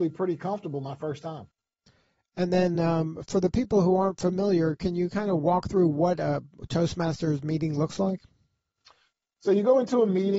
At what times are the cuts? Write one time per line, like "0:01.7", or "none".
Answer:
none